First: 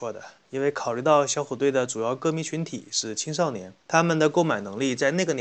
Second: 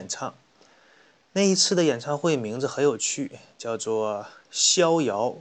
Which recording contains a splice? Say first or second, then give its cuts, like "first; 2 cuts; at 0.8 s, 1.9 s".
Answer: first; 1 cut; at 3.8 s